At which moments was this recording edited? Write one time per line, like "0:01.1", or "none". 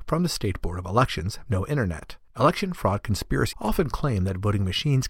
0:01.5
0:02.3
0:03.5

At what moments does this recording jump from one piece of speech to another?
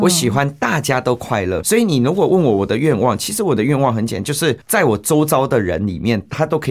0:01.6
0:04.6

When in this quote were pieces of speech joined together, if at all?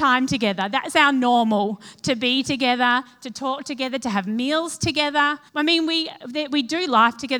0:05.5

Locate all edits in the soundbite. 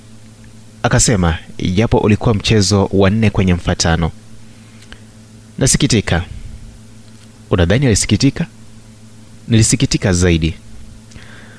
none

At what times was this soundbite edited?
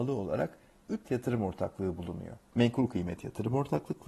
0:01.0
0:02.5

